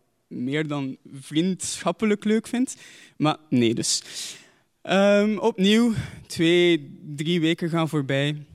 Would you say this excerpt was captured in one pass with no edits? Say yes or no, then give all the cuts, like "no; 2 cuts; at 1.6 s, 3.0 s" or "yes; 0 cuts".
yes; 0 cuts